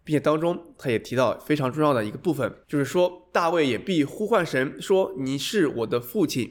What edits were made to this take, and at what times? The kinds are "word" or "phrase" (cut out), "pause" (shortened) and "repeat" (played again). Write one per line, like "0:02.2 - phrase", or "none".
0:02.6 - pause